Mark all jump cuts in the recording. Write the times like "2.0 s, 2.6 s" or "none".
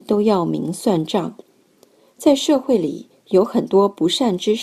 none